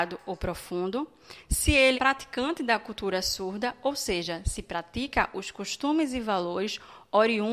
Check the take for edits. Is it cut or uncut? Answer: cut